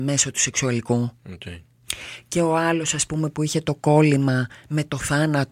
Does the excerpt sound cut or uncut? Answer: cut